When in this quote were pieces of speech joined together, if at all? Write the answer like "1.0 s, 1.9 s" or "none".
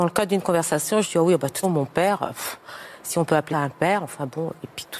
1.6 s, 3.5 s